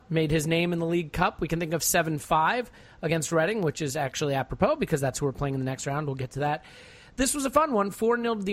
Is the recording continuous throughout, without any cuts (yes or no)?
yes